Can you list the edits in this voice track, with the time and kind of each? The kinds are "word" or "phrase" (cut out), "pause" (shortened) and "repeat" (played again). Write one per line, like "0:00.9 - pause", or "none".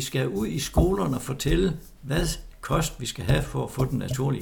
none